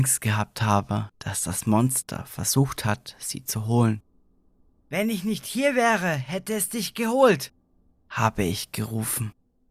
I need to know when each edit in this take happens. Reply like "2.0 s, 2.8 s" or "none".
none